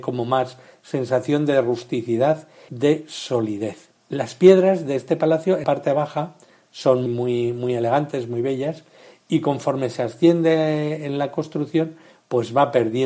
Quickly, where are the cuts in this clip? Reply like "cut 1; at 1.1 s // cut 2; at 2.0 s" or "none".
cut 1; at 2.7 s // cut 2; at 4.0 s // cut 3; at 5.6 s // cut 4; at 7.1 s

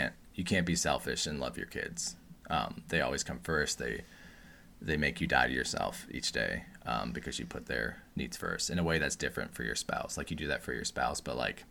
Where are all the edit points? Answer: none

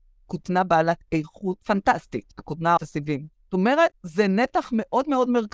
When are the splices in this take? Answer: cut 1; at 1.6 s // cut 2; at 2.8 s // cut 3; at 3.3 s // cut 4; at 3.9 s

